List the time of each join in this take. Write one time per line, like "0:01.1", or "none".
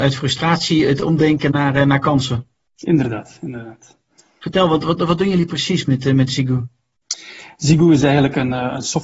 none